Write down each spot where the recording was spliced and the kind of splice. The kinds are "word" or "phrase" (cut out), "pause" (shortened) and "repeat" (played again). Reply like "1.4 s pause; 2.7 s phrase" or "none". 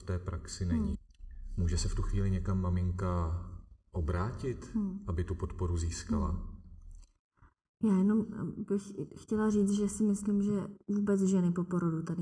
none